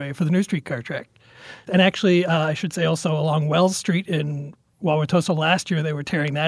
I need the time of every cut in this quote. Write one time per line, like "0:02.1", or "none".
none